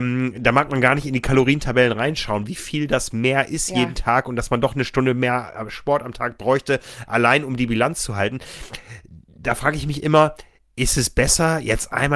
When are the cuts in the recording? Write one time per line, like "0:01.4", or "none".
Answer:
none